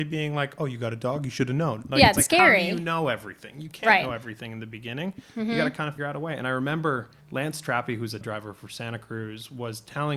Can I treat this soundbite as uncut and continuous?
no; 3 cuts; at 6.0 s, 7.2 s, 8.2 s

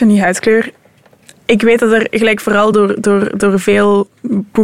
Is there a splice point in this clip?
no; 0 cuts

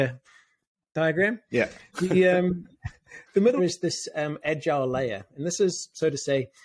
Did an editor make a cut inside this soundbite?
yes; 1 cut; at 3.6 s

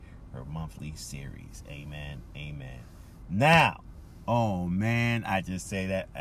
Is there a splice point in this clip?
no; 0 cuts

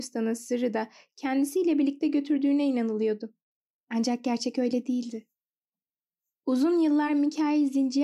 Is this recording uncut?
yes; 0 cuts

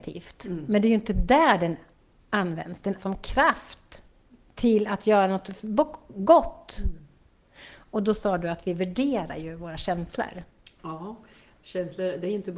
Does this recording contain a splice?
yes; 1 cut; at 3.0 s

